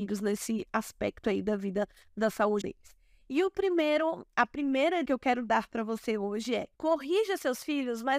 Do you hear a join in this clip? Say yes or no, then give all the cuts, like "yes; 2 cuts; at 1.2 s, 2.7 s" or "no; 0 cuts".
yes; 3 cuts; at 2.6 s, 5.0 s, 6.7 s